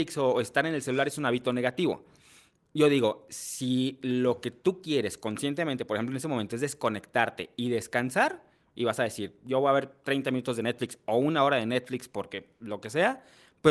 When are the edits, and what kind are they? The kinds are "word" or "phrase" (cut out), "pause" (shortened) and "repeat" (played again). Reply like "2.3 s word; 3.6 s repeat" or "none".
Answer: none

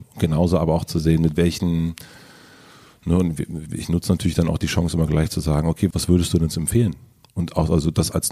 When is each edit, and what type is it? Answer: 5.9 s word

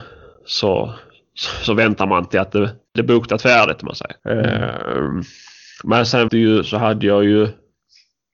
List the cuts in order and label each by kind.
2.9 s pause; 4.2 s pause; 6.3 s word

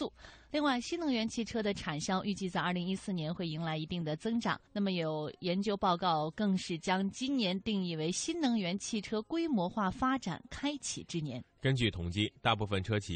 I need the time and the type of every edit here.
4.7 s pause

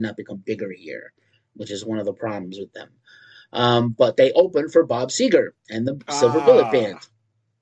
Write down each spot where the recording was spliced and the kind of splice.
5.6 s pause

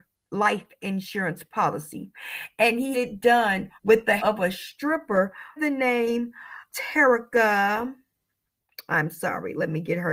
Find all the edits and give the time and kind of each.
2.9 s word; 3.7 s pause; 4.2 s word; 5.6 s word; 6.7 s word

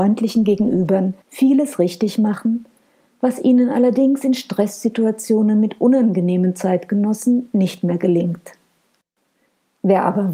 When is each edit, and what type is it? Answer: 1.2 s pause

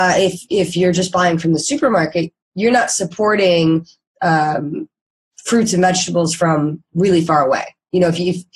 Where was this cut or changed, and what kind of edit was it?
none

